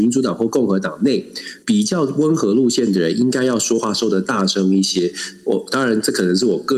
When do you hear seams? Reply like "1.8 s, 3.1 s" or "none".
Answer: 1.6 s

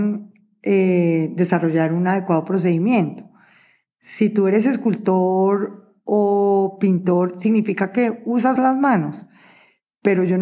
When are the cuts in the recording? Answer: 8.6 s

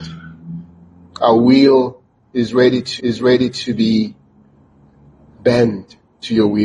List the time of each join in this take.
3.0 s

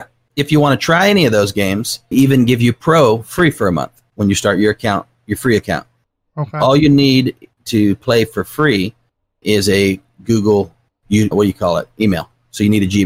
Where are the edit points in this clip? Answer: 2.1 s, 9.4 s, 11.3 s

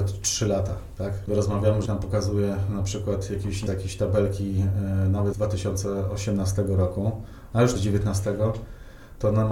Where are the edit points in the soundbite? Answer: 1.3 s, 1.9 s, 3.7 s, 5.3 s, 7.8 s

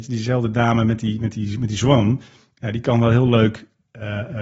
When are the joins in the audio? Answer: none

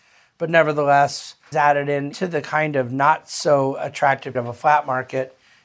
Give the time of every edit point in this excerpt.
1.5 s, 2.1 s, 4.3 s

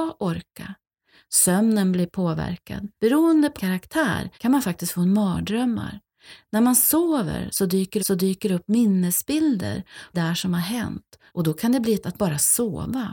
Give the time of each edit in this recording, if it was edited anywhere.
3.0 s, 3.6 s, 4.3 s, 8.0 s, 10.1 s, 11.3 s, 12.0 s

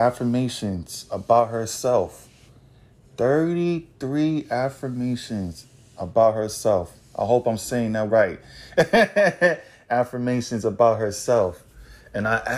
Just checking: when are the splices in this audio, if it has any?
8.1 s

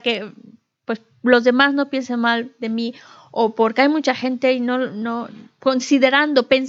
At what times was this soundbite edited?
none

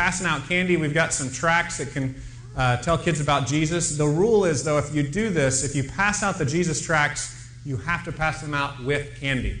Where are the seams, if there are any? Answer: none

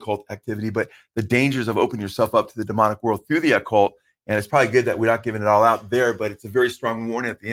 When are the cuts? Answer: none

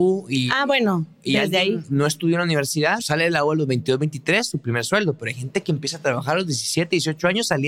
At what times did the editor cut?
3.0 s

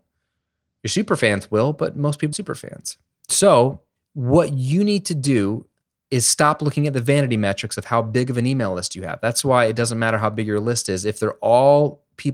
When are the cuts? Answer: 2.3 s, 4.0 s, 5.8 s

